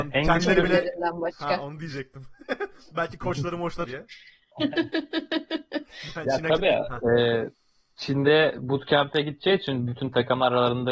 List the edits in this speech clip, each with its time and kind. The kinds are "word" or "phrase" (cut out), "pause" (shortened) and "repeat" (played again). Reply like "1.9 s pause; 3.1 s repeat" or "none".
3.8 s phrase